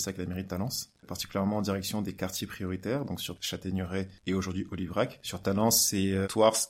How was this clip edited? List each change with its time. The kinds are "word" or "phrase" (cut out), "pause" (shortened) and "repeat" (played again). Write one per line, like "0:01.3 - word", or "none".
0:03.4 - phrase
0:04.2 - pause